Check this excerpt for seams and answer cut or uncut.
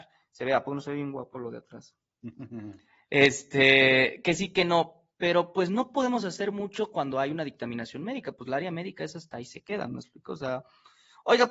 uncut